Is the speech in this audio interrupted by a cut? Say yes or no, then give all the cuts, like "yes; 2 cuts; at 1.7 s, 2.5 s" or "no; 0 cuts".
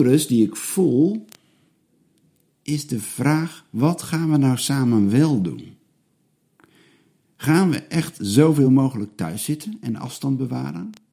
no; 0 cuts